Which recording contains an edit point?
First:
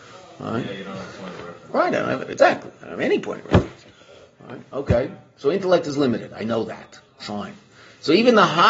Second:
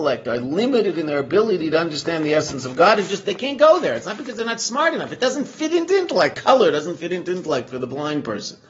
second; 1 cut; at 6.3 s

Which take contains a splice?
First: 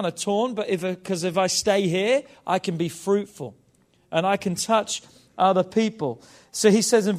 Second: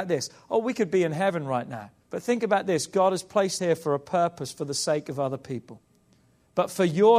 second; 2 cuts; at 2.0 s, 3.6 s

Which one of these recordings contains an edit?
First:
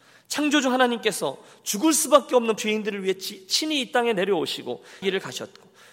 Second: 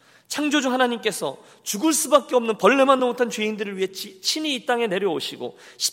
first; 2 cuts; at 2.6 s, 5.0 s

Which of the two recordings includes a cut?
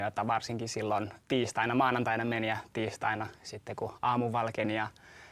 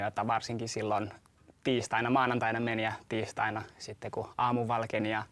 first; 1 cut; at 1.2 s

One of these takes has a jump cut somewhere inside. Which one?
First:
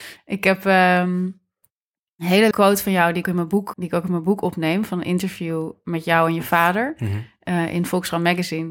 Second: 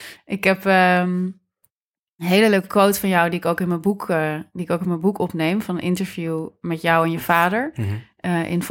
first; 3 cuts; at 2.5 s, 3.2 s, 3.7 s

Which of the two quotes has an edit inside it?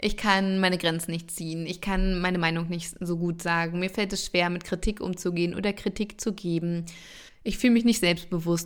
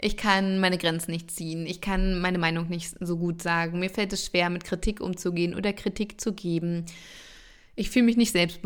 first; 1 cut; at 7.3 s

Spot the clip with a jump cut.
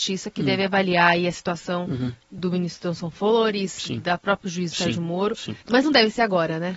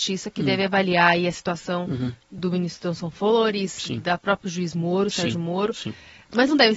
first; 2 cuts; at 4.7 s, 5.6 s

